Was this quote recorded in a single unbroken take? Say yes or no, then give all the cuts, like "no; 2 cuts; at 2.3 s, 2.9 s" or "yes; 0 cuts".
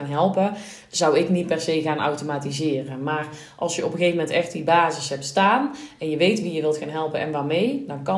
yes; 0 cuts